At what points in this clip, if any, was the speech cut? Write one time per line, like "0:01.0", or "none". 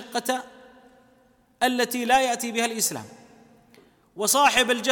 none

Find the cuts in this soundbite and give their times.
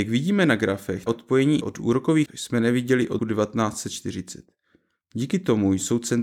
0:01.1
0:01.6
0:02.3
0:03.2

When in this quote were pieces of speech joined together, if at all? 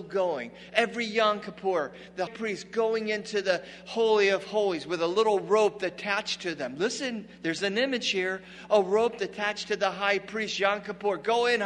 0:02.3

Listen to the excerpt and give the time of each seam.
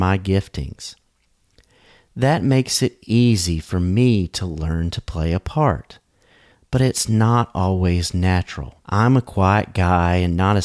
0:08.8

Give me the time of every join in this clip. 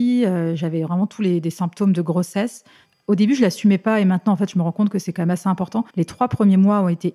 0:05.9

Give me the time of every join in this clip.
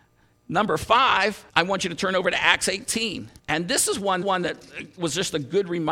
0:01.5
0:03.4
0:04.2

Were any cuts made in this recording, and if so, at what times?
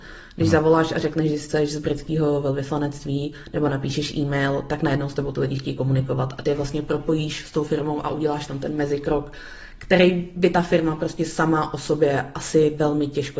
none

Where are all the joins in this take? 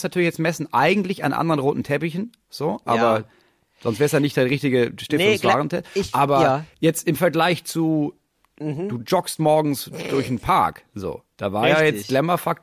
0:06.7

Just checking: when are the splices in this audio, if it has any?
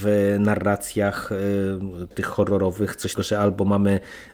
0:02.1
0:03.2

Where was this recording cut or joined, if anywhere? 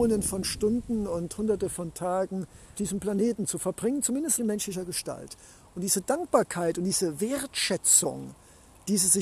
0:02.8
0:04.4

